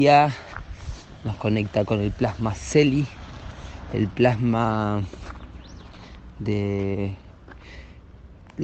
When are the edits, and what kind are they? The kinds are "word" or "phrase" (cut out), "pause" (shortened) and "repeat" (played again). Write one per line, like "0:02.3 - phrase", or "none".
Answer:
none